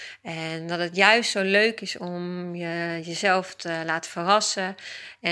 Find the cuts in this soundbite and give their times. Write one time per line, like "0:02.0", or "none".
none